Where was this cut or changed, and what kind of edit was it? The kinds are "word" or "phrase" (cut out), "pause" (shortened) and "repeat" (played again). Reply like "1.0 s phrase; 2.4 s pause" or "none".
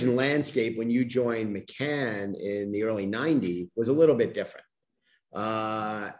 none

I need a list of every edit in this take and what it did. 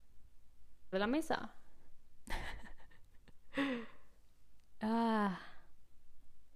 0.9 s phrase

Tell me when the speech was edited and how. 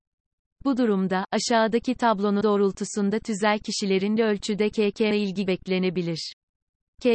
2.4 s word; 4.2 s word; 5.1 s word; 5.5 s word

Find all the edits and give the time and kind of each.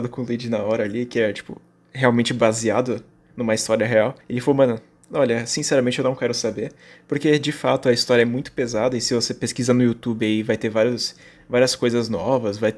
none

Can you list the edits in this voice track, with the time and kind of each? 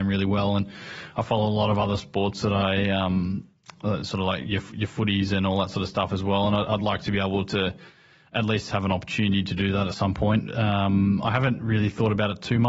none

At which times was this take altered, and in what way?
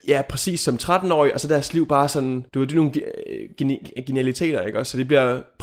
2.5 s pause

